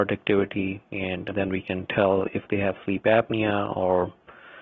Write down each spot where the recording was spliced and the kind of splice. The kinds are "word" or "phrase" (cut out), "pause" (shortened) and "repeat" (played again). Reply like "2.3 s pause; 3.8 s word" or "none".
none